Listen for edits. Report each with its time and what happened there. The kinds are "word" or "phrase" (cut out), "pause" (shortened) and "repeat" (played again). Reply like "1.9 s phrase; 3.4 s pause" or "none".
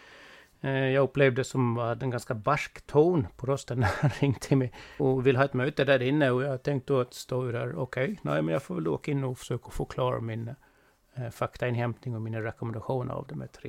5.0 s word